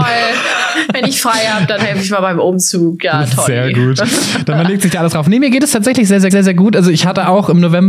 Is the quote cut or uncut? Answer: cut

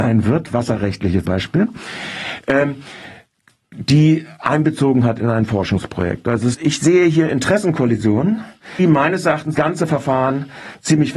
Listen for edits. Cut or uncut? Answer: cut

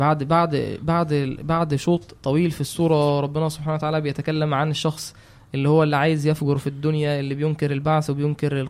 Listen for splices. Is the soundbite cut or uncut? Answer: uncut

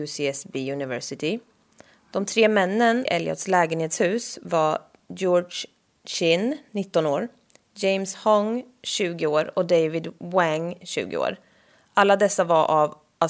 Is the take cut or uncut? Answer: cut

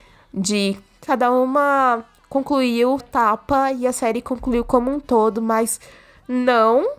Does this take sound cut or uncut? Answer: cut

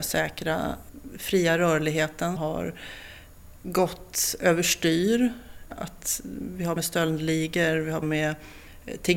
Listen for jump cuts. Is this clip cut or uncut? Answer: cut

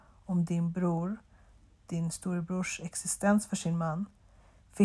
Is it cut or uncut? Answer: uncut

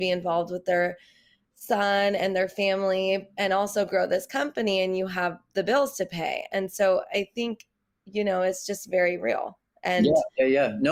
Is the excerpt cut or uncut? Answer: uncut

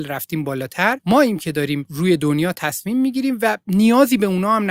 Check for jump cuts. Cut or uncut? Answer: uncut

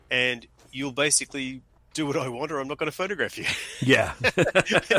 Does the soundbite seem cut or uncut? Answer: cut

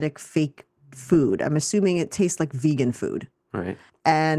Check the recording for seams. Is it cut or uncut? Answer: uncut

